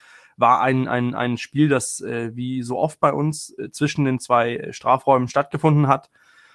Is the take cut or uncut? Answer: uncut